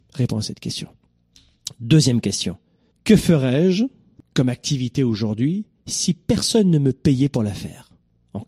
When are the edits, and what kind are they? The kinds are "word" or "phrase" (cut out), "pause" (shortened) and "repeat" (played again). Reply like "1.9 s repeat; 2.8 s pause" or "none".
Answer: none